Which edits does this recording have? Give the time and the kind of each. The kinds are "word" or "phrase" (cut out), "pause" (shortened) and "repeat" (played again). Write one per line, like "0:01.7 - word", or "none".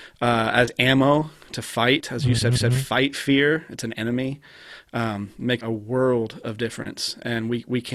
0:02.6 - repeat
0:05.6 - word

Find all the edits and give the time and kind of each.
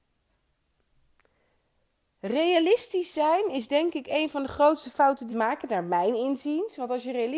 0:05.3 - phrase

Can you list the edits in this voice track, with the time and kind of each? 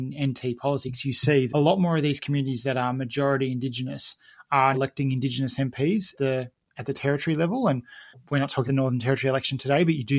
0:01.5 - word
0:04.7 - word
0:06.2 - word
0:08.1 - word
0:08.7 - word

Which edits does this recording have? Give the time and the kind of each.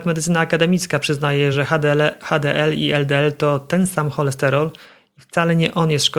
none

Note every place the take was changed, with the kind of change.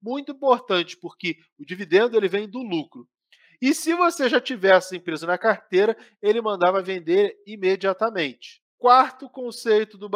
none

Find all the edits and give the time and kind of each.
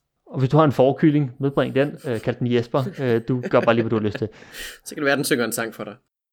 none

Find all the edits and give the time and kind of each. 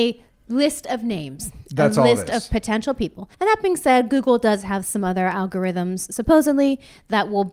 0:03.3 - pause

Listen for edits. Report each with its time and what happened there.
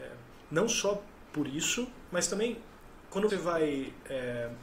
0:03.3 - word

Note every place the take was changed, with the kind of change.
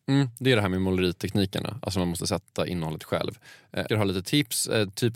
0:03.9 - word

